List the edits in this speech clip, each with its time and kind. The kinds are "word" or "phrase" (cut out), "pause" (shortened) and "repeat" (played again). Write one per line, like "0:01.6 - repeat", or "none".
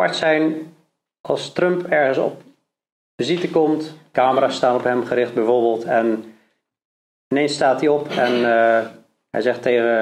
none

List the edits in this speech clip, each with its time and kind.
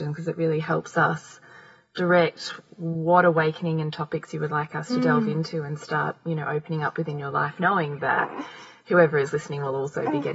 none

